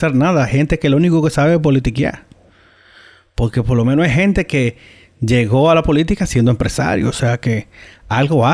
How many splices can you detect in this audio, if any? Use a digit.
0